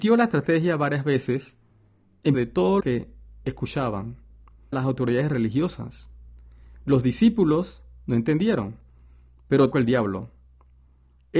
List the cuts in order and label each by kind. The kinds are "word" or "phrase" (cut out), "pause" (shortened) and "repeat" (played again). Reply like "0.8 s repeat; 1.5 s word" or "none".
2.3 s word; 2.8 s word; 4.7 s word; 9.7 s word